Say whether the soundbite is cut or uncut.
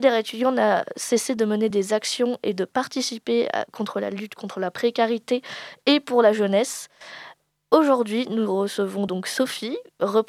uncut